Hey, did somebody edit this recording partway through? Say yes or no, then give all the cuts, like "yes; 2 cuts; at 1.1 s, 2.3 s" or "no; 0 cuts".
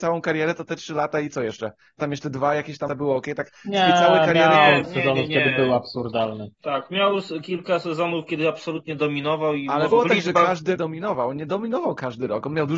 yes; 6 cuts; at 2.0 s, 2.9 s, 4.8 s, 6.5 s, 9.9 s, 10.8 s